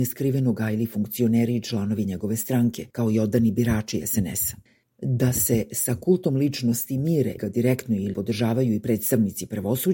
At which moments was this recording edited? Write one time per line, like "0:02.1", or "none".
0:02.9
0:04.7
0:07.4
0:08.1